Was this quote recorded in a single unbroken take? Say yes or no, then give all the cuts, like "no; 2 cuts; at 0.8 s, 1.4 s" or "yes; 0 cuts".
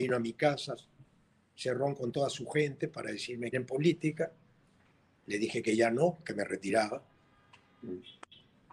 no; 1 cut; at 3.5 s